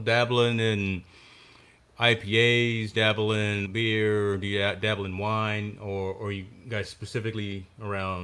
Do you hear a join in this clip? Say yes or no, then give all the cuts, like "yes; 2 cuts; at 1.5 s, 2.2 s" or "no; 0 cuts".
yes; 2 cuts; at 2.9 s, 3.6 s